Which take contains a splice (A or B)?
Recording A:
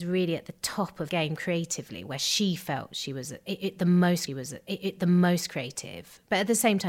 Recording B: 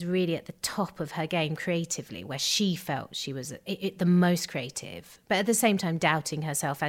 A